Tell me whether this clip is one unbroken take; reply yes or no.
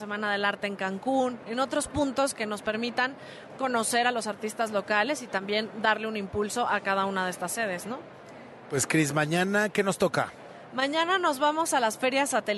no